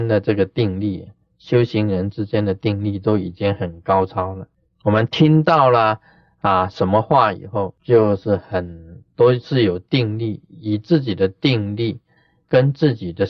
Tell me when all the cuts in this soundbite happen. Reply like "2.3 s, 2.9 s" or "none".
none